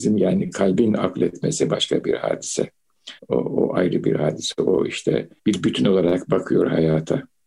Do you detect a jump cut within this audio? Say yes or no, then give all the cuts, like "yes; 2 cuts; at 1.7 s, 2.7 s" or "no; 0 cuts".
yes; 2 cuts; at 3.2 s, 5.4 s